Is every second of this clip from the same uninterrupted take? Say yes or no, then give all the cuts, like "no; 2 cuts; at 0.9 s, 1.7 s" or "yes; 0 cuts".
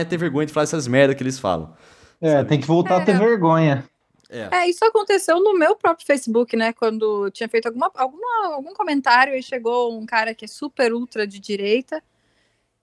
yes; 0 cuts